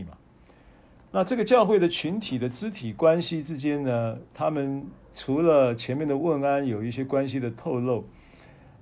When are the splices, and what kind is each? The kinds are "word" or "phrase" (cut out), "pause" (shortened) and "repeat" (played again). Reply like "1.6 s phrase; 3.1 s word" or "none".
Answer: 4.3 s pause; 5.0 s pause